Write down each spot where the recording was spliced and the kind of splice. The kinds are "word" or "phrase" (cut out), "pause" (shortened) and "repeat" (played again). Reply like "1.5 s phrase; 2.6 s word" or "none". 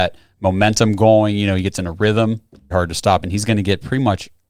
2.7 s word